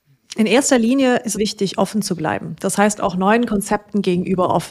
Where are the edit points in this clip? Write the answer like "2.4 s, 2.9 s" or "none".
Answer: 1.3 s